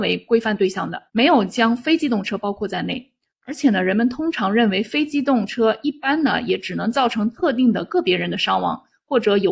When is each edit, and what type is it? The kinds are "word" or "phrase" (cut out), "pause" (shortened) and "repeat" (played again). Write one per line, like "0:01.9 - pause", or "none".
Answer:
0:01.1 - pause

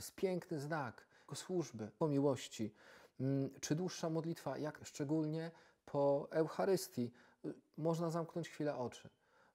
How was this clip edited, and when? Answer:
0:01.3 - word
0:02.0 - word
0:04.8 - word

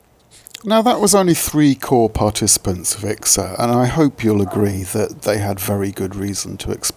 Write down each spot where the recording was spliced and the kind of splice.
none

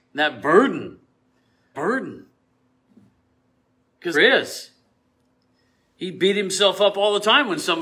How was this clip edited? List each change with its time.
0:01.7 - word
0:04.1 - word

